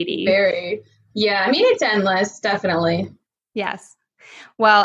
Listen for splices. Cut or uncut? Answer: uncut